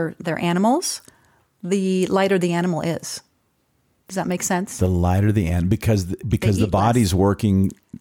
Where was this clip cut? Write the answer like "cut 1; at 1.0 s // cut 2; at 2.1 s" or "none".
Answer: none